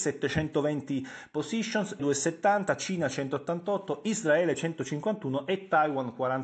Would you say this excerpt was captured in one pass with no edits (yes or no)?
no